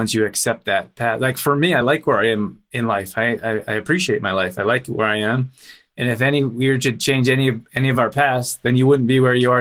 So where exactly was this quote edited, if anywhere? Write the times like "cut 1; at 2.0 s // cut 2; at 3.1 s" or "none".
none